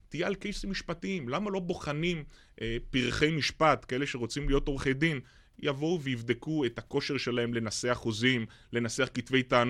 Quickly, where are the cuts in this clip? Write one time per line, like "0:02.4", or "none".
none